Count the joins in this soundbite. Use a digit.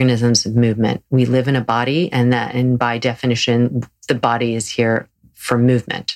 0